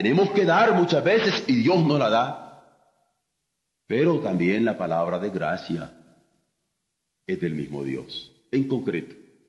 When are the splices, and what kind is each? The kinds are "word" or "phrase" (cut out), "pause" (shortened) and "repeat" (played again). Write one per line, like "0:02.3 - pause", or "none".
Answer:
none